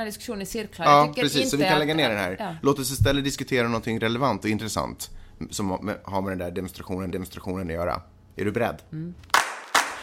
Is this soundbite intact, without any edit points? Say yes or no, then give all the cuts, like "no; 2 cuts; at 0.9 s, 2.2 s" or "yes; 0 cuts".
no; 1 cut; at 7.1 s